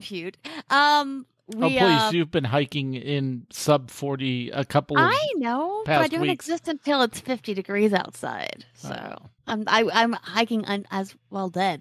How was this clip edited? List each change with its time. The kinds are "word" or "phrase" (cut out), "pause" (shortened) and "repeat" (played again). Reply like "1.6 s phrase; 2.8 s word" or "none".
9.4 s pause